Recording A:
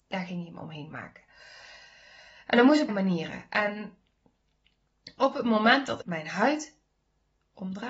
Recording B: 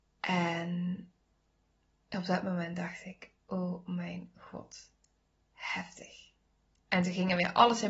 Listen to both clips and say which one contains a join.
A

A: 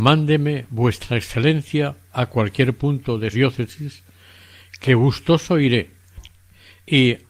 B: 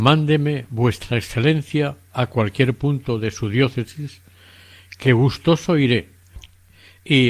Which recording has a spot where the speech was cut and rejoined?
A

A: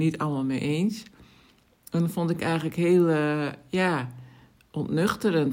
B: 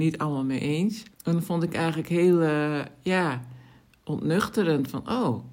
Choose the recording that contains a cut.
B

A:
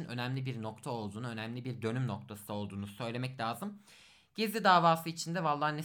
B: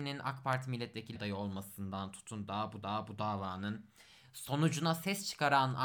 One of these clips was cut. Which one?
B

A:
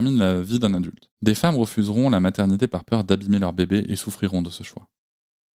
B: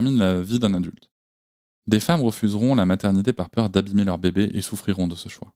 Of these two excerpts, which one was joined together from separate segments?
A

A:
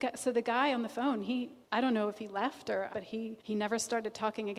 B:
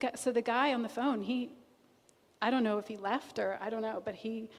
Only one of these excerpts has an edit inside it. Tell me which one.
A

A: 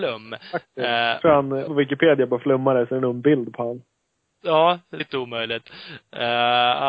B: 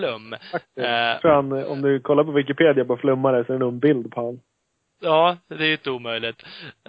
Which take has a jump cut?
A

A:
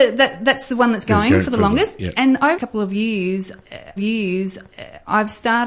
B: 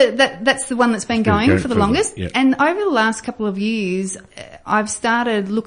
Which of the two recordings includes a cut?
A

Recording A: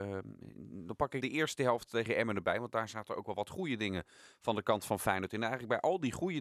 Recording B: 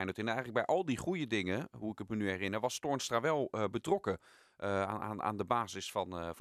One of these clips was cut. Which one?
A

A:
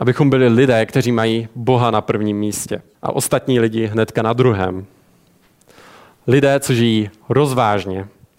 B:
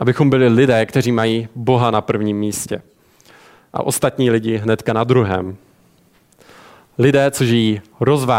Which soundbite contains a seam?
A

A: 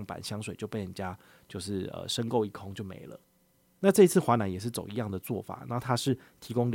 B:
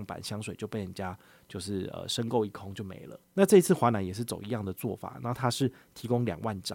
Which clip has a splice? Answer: B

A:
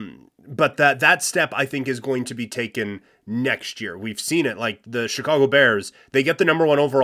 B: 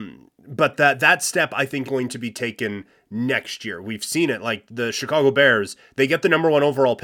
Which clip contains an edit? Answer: B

